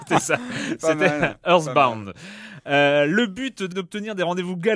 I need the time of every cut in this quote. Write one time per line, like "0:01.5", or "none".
0:03.7